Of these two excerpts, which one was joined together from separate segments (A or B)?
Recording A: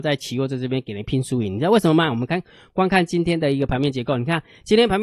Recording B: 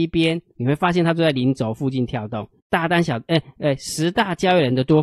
B